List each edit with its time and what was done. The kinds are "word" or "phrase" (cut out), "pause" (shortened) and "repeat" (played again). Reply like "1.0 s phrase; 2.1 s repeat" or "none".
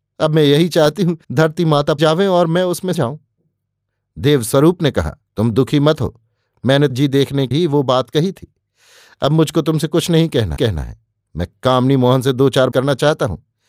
1.2 s pause; 2.0 s word; 2.9 s word; 5.3 s pause; 6.9 s word; 7.5 s word; 10.6 s repeat; 12.7 s word